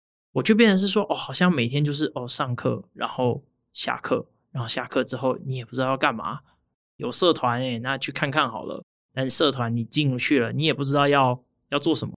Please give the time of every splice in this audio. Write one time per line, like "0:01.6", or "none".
none